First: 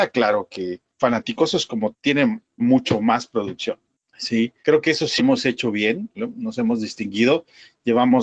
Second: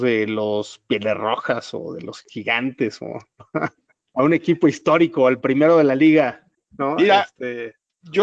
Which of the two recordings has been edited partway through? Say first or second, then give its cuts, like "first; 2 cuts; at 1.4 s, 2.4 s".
first; 5 cuts; at 0.9 s, 1.9 s, 2.6 s, 4.6 s, 5.2 s